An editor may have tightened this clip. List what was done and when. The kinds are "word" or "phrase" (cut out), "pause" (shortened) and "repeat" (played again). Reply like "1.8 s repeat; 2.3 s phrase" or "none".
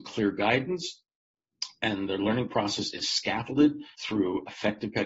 3.9 s pause